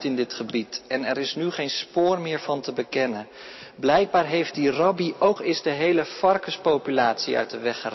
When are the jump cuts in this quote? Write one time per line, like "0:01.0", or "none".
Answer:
0:05.4

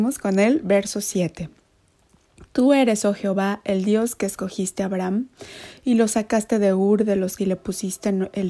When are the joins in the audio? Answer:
0:07.4

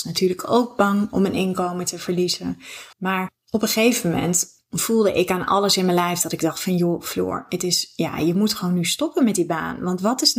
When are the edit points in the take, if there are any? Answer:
0:02.9

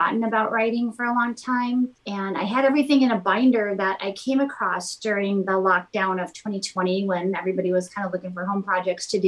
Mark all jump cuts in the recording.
0:02.0

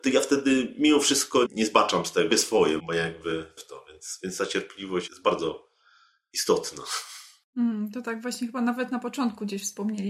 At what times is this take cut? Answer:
0:01.5
0:02.3
0:02.8
0:03.6
0:05.1

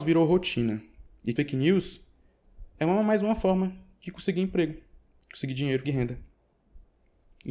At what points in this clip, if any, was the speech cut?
0:01.4
0:05.8

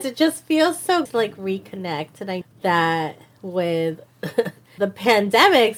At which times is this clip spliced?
0:01.1
0:02.4
0:04.8

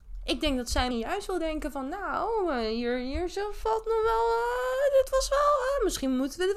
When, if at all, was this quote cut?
0:00.9

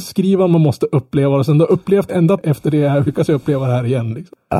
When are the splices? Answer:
0:02.1
0:02.4
0:03.1

